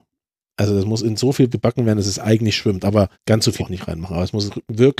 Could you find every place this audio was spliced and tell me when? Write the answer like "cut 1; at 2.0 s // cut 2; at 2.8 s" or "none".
cut 1; at 1.5 s // cut 2; at 3.1 s // cut 3; at 3.6 s